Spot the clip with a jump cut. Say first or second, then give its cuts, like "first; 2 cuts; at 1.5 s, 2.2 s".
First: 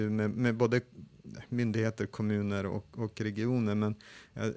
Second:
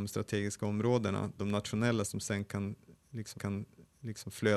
second; 3 cuts; at 1.4 s, 2.0 s, 3.3 s